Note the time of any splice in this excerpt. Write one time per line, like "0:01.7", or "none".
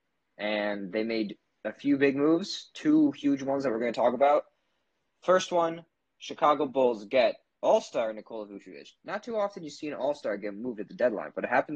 none